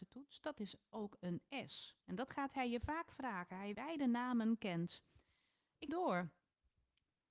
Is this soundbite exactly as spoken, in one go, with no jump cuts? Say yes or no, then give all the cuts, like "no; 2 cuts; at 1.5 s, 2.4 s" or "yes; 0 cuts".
no; 3 cuts; at 2.0 s, 3.7 s, 5.9 s